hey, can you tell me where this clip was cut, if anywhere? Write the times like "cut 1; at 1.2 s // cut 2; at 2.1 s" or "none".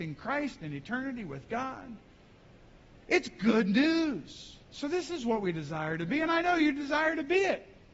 cut 1; at 4.6 s